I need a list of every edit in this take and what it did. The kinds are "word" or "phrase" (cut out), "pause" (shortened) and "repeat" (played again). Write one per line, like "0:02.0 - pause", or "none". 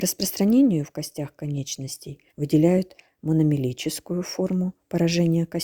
0:02.3 - pause